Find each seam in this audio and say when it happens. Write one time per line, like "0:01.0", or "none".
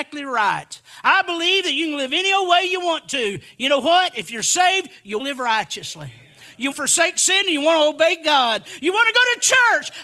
0:05.2
0:06.7